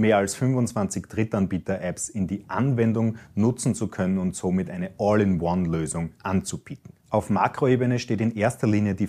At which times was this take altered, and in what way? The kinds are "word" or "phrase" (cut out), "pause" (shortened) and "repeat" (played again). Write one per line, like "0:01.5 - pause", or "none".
0:07.0 - pause